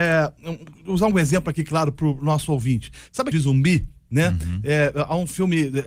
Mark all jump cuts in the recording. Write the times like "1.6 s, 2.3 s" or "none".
3.3 s